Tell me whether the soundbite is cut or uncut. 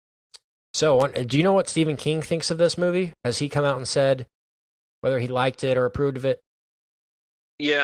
uncut